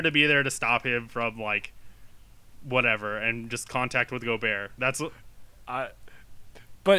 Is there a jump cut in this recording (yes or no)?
no